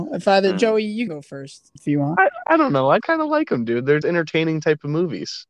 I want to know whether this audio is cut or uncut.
cut